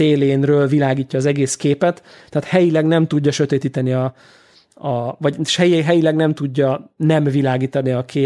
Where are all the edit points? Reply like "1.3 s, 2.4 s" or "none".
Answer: none